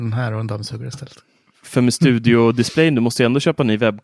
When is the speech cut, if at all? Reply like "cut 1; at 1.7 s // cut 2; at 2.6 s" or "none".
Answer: none